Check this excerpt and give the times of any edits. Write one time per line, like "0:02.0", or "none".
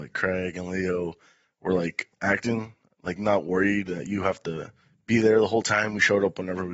none